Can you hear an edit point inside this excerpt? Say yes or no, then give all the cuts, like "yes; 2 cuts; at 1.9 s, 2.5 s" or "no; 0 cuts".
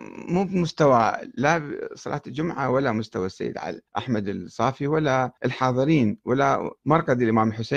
yes; 3 cuts; at 3.9 s, 5.4 s, 6.8 s